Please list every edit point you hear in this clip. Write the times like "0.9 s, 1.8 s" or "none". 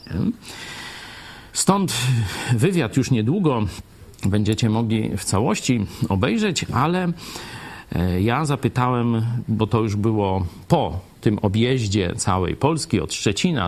1.5 s, 4.1 s, 11.1 s